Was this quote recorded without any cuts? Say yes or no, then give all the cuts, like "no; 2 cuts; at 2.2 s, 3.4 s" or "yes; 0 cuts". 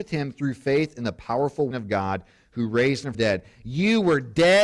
no; 2 cuts; at 1.7 s, 3.1 s